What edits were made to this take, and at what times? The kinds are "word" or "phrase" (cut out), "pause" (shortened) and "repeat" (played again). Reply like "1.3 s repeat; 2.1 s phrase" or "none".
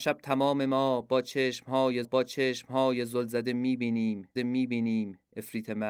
2.0 s repeat; 4.4 s repeat